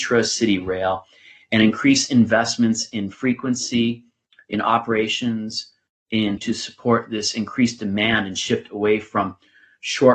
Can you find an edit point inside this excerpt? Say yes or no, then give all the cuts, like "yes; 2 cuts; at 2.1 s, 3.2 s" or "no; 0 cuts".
yes; 1 cut; at 6.4 s